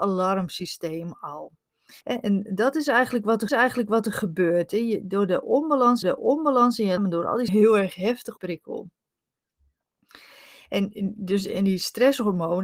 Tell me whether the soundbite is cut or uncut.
cut